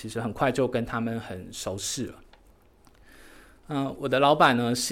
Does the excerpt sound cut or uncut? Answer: uncut